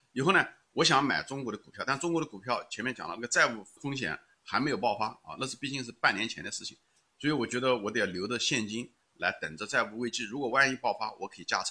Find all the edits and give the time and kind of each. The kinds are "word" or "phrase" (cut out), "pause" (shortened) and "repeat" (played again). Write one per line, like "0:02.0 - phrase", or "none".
0:03.8 - word